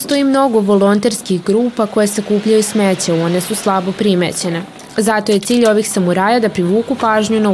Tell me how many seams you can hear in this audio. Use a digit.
0